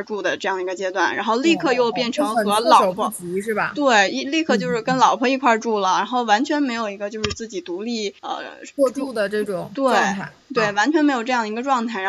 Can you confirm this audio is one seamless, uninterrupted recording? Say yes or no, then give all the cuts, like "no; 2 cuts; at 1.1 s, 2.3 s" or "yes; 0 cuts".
no; 1 cut; at 8.2 s